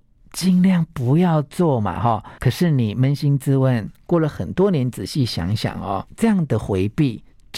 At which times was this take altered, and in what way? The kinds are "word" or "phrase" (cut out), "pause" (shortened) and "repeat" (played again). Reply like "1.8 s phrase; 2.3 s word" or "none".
2.4 s pause; 6.1 s pause